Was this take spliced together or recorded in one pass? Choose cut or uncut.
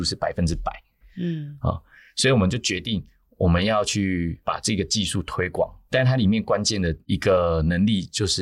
uncut